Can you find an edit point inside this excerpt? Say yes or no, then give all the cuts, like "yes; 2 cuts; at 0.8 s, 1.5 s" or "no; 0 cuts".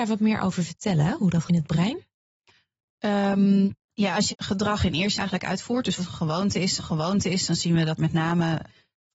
yes; 7 cuts; at 1.5 s, 3.8 s, 4.3 s, 5.2 s, 6.0 s, 6.8 s, 8.0 s